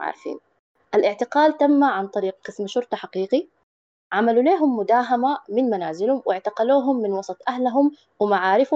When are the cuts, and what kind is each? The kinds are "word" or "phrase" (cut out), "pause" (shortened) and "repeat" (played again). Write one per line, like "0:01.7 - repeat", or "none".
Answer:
none